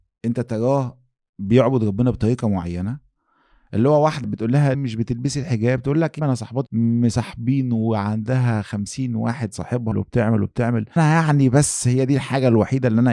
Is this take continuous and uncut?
no; 6 cuts; at 4.2 s, 4.7 s, 6.2 s, 6.7 s, 9.9 s, 11.0 s

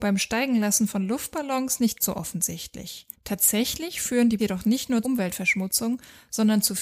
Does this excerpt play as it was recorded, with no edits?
no; 4 cuts; at 2.0 s, 3.1 s, 4.4 s, 5.0 s

